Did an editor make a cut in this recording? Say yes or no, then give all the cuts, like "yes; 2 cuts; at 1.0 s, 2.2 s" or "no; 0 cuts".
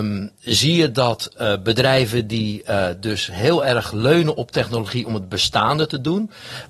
no; 0 cuts